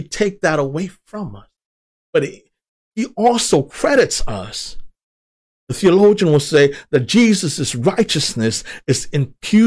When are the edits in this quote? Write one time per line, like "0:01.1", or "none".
none